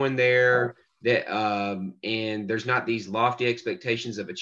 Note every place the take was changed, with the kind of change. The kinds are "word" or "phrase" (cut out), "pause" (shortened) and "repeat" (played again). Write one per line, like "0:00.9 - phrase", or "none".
none